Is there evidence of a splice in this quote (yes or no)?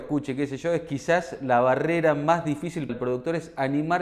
yes